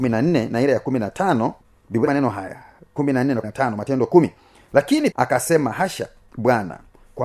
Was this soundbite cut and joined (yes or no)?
yes